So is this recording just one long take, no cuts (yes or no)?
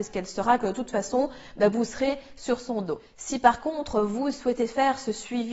yes